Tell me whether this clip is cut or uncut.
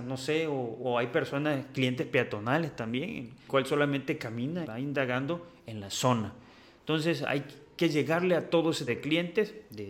cut